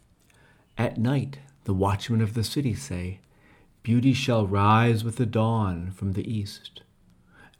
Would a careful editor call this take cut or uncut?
uncut